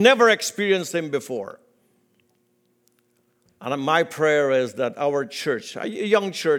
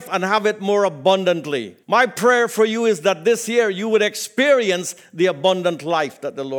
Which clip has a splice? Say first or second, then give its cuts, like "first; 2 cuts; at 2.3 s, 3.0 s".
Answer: second; 1 cut; at 1.8 s